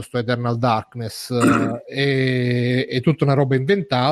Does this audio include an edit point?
no; 0 cuts

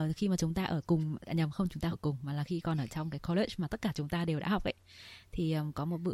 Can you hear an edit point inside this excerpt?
yes; 1 cut; at 1.9 s

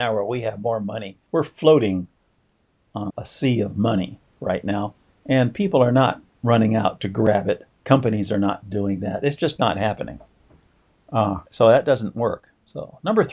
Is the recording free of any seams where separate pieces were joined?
no; 5 cuts; at 1.3 s, 3.1 s, 5.1 s, 7.7 s, 11.5 s

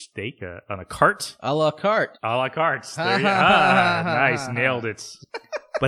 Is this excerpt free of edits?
yes; 0 cuts

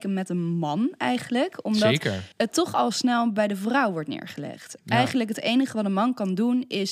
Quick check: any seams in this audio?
yes; 1 cut; at 2.3 s

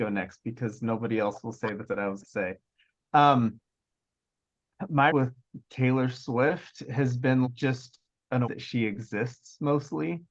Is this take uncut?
no; 5 cuts; at 1.9 s, 2.2 s, 5.1 s, 7.4 s, 8.4 s

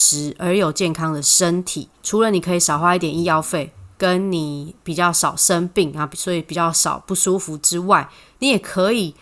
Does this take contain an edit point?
yes; 1 cut; at 1.9 s

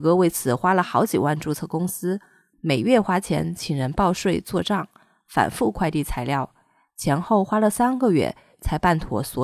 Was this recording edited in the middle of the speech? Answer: no; 0 cuts

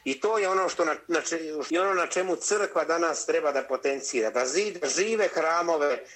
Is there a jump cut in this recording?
yes; 1 cut; at 1.7 s

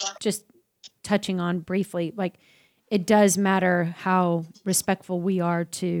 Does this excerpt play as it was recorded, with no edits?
yes; 0 cuts

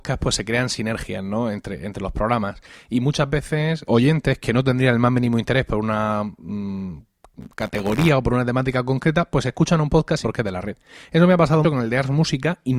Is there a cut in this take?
yes; 3 cuts; at 3.8 s, 10.2 s, 11.6 s

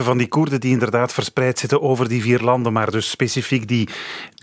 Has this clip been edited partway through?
no; 0 cuts

